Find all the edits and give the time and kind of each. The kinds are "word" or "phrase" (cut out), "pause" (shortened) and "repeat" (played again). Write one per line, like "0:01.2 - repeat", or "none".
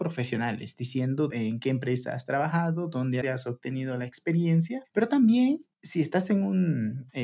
0:01.3 - phrase
0:03.2 - phrase
0:05.7 - pause